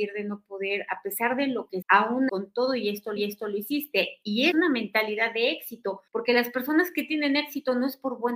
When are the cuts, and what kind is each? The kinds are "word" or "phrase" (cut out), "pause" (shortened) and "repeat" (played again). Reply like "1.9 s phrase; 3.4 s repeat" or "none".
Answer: 1.8 s word; 2.3 s word; 3.2 s repeat; 4.5 s phrase; 6.1 s pause